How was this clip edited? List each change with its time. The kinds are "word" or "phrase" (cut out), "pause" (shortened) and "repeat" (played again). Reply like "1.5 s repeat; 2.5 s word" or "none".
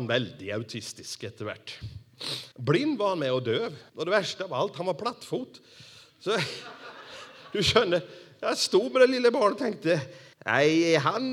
2.5 s pause; 3.9 s pause; 10.3 s pause